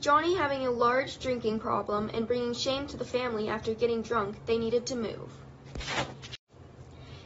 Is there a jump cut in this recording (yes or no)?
no